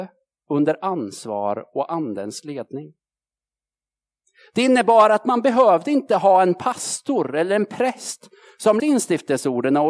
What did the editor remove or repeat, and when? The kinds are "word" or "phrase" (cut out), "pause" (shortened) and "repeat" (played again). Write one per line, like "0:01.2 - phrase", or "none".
0:08.8 - word

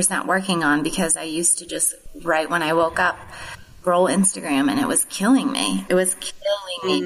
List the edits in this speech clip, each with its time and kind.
none

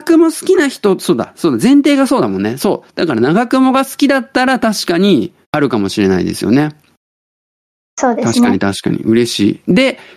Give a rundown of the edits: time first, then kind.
0:05.4 - pause

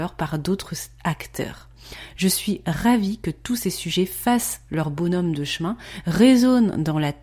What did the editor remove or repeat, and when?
none

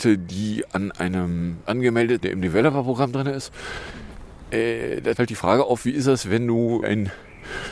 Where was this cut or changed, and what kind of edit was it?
0:01.7 - word
0:02.2 - word
0:05.2 - word
0:06.8 - word

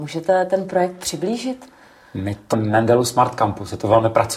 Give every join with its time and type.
0:02.5 - word

